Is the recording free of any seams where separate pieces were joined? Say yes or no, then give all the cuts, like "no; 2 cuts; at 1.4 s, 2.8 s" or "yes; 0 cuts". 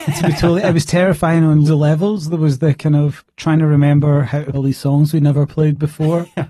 no; 2 cuts; at 1.6 s, 4.5 s